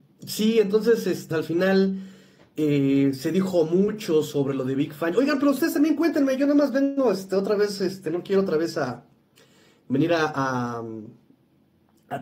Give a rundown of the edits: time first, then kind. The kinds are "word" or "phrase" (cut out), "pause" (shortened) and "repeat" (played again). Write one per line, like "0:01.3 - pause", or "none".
0:01.3 - word